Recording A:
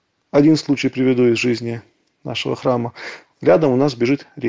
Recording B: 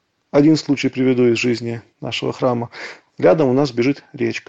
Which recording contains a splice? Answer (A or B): B